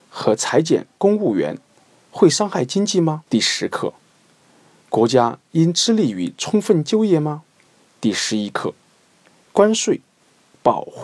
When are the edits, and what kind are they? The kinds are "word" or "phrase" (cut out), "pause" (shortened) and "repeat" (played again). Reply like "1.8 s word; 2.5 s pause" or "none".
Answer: 3.3 s pause; 7.7 s pause